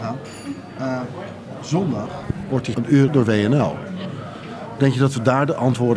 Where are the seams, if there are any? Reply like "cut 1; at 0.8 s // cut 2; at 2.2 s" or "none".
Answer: cut 1; at 2.7 s // cut 2; at 3.1 s